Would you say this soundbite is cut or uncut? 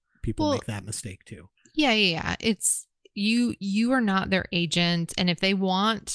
uncut